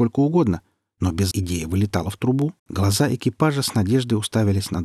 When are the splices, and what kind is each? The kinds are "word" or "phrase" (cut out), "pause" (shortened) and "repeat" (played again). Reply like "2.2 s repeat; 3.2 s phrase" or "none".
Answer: 1.3 s word; 2.6 s pause

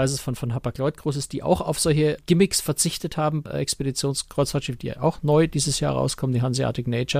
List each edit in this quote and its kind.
2.2 s word; 3.5 s word

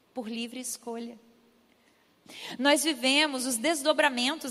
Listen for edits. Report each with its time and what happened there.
none

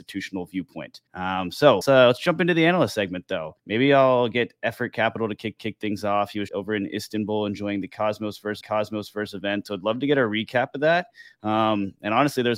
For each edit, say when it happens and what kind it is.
1.1 s pause; 1.8 s word; 3.6 s pause; 5.6 s repeat; 6.5 s word; 8.6 s repeat

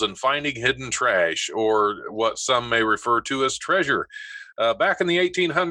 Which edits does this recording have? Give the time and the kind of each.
none

